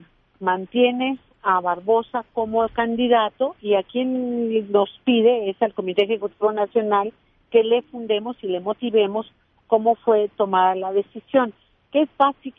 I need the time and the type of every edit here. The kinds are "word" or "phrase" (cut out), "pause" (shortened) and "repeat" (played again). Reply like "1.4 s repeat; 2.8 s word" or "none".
none